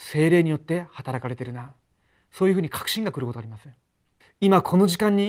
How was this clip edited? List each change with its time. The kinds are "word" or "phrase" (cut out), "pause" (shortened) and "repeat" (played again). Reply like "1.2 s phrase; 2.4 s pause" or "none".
4.2 s pause